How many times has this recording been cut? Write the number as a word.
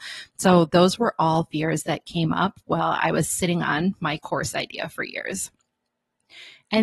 zero